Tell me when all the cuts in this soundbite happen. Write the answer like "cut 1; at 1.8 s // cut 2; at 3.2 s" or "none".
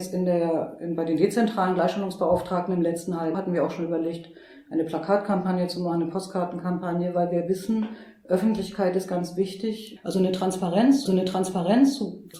cut 1; at 3.3 s // cut 2; at 11.1 s